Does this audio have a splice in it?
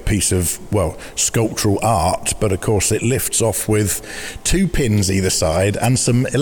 no; 0 cuts

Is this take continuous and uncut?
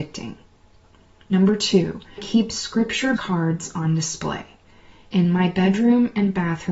no; 2 cuts; at 2.2 s, 3.2 s

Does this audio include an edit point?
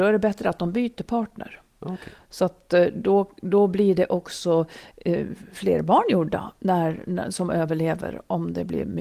no; 0 cuts

